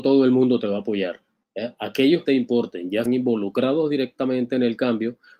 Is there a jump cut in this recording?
yes; 3 cuts; at 1.4 s, 2.3 s, 3.1 s

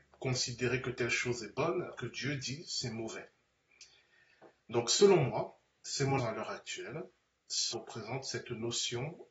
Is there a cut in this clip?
yes; 3 cuts; at 2.0 s, 6.2 s, 7.7 s

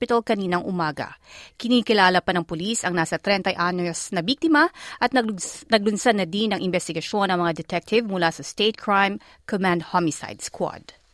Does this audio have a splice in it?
no; 0 cuts

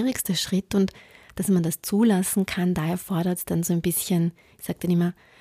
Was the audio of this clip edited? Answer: no; 0 cuts

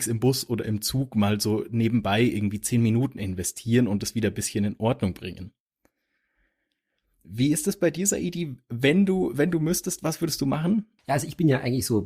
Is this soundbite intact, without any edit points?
yes; 0 cuts

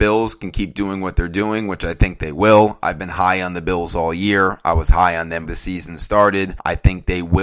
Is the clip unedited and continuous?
no; 1 cut; at 5.5 s

